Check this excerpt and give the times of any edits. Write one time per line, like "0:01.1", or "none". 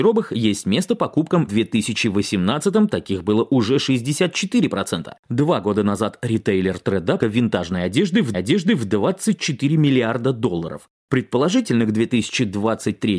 0:01.5
0:05.2
0:07.2
0:08.3